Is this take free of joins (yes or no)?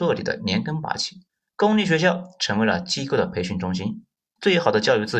no